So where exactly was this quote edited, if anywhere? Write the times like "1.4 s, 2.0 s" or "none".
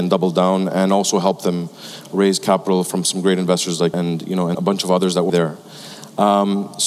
3.9 s, 4.5 s, 5.3 s

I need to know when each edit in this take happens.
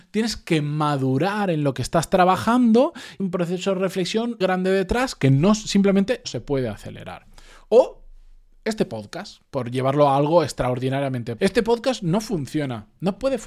3.2 s, 4.4 s, 6.2 s, 11.4 s

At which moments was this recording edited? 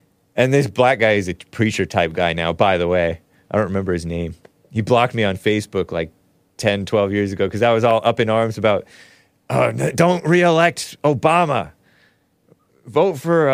none

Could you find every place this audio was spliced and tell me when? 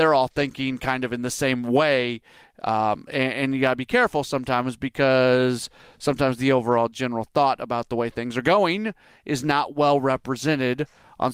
none

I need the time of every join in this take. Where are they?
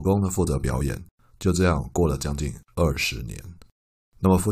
none

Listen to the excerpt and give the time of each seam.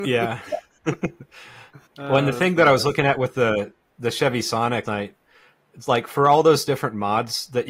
1.9 s, 4.8 s

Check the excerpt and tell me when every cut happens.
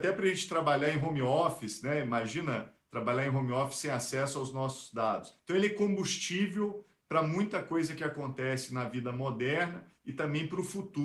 5.4 s

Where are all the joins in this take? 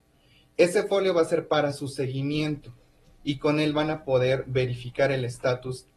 none

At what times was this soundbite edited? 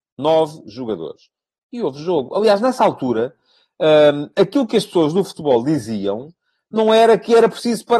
none

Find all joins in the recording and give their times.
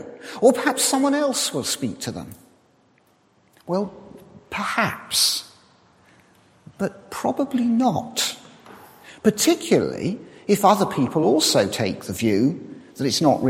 none

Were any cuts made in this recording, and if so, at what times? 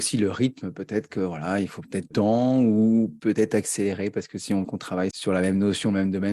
2.1 s, 4.6 s, 5.1 s

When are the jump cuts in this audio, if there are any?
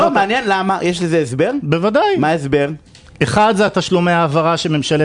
none

